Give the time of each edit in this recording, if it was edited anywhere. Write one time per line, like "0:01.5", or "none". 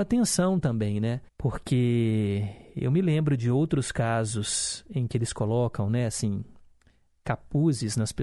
0:01.3